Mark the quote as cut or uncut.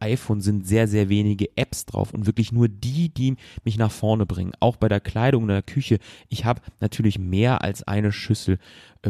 uncut